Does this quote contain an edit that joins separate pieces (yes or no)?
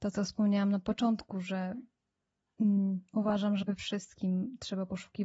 yes